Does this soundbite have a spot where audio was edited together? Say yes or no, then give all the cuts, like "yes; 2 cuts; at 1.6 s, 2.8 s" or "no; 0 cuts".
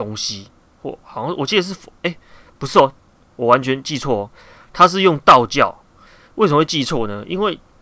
no; 0 cuts